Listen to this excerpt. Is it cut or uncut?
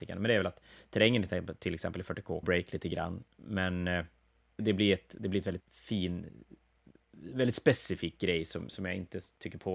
cut